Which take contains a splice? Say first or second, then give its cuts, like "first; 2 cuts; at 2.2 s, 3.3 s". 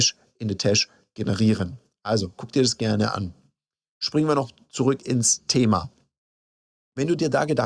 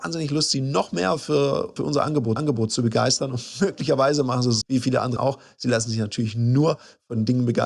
second; 4 cuts; at 1.8 s, 2.4 s, 4.6 s, 5.2 s